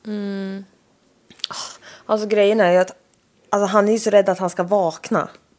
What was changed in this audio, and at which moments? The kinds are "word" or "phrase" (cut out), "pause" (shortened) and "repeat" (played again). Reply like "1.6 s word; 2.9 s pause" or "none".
none

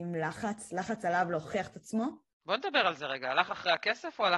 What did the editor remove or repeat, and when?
none

